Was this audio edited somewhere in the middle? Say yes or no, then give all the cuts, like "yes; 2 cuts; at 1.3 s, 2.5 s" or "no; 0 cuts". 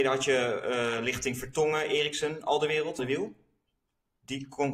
yes; 1 cut; at 3.0 s